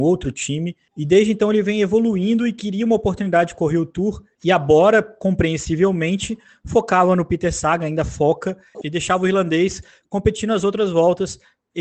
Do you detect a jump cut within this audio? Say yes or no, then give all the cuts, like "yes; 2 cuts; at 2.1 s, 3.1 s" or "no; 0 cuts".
no; 0 cuts